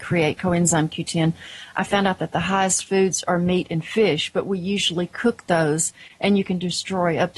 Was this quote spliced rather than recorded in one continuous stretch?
no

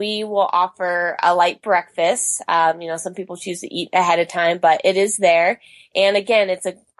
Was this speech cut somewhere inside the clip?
no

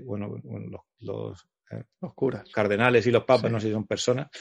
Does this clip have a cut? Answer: no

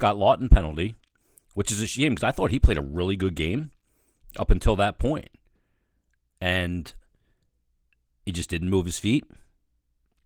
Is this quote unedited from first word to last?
yes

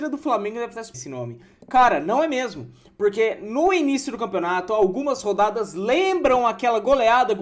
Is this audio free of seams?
no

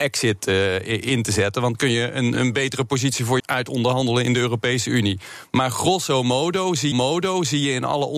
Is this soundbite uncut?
no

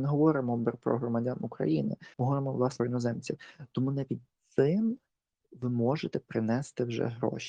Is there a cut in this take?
yes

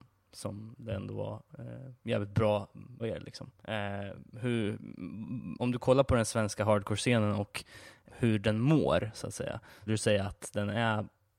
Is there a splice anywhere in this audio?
yes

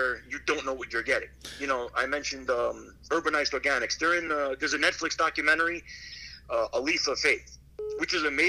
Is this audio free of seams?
yes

